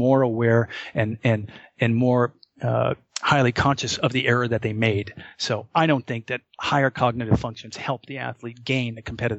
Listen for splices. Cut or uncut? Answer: uncut